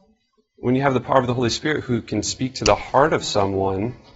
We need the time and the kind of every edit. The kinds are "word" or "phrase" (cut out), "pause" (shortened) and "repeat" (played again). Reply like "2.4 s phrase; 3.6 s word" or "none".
none